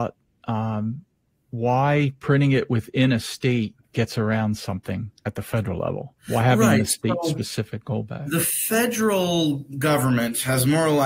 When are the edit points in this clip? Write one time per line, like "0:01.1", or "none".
0:03.8
0:06.2

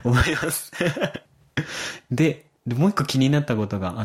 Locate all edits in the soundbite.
0:01.2
0:02.6

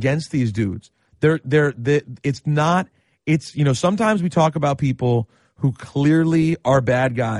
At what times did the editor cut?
none

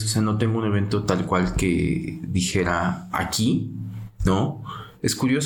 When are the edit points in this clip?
none

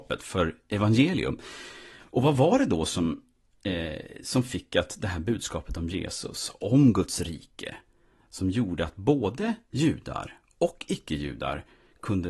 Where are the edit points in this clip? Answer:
none

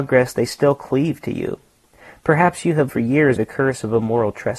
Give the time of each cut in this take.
0:02.9
0:03.4

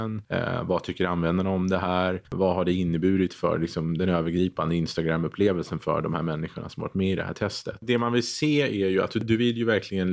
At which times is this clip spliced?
0:02.3

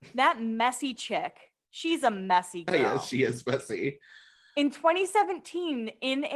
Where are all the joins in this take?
none

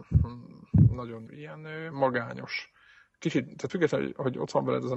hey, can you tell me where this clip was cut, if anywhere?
0:01.3
0:03.7

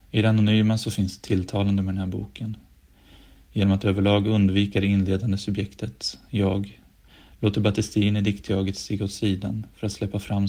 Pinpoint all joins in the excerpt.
none

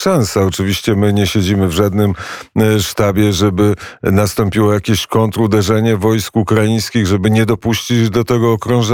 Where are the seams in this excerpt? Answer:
none

